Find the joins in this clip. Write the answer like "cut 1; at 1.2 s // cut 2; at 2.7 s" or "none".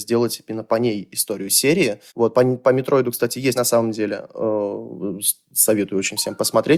cut 1; at 2.1 s // cut 2; at 3.6 s